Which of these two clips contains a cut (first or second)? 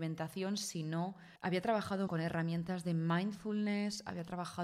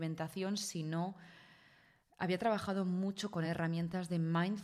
first